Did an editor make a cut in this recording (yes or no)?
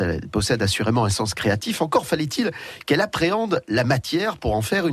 no